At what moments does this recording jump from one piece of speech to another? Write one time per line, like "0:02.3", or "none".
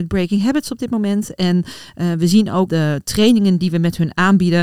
0:02.7